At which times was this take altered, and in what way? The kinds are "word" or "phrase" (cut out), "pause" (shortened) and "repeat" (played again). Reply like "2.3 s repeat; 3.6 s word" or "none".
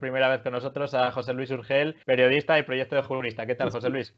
2.0 s pause